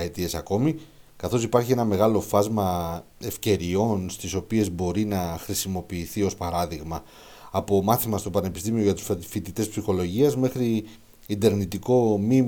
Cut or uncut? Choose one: uncut